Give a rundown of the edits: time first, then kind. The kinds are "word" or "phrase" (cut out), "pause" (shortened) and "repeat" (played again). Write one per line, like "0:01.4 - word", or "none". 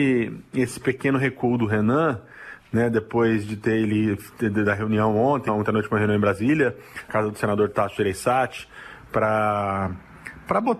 0:05.5 - word
0:07.1 - word